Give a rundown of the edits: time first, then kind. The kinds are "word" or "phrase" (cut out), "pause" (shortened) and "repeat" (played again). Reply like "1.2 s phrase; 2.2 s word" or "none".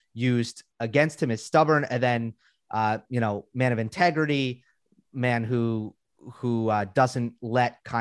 none

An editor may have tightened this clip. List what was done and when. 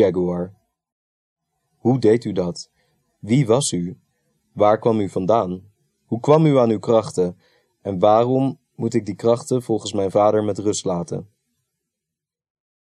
none

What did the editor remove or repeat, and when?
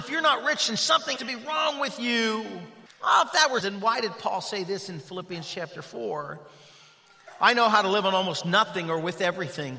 1.2 s word; 2.9 s pause; 3.6 s phrase

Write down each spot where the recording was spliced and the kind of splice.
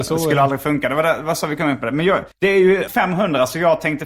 2.3 s pause; 2.9 s word

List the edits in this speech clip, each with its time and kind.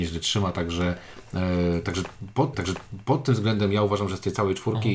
2.5 s repeat

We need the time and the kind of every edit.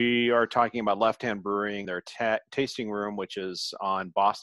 1.8 s word

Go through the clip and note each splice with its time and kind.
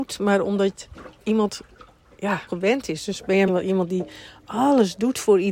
2.5 s phrase; 3.5 s word

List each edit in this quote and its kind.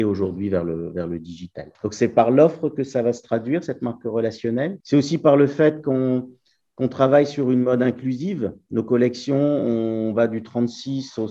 1.7 s pause; 4.8 s pause

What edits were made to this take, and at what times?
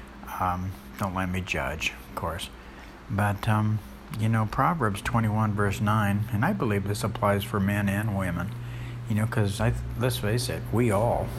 none

